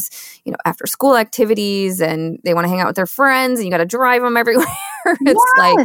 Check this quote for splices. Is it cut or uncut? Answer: uncut